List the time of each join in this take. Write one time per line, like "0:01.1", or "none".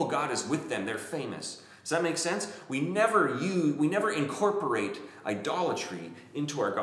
none